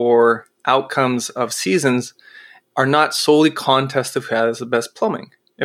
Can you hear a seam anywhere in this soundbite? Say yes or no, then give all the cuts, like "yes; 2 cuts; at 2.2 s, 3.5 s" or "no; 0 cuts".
no; 0 cuts